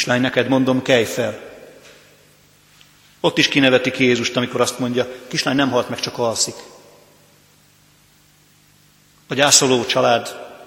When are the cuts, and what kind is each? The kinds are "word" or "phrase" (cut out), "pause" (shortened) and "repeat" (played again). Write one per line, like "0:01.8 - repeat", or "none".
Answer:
none